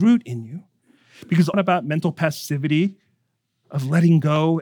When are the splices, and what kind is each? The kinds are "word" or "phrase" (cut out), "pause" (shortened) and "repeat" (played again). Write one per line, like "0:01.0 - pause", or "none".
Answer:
0:01.5 - phrase